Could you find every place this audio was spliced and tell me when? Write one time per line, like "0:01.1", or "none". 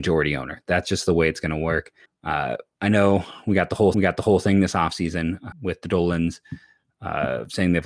0:02.1
0:03.9
0:05.5